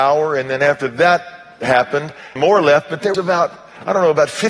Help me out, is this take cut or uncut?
cut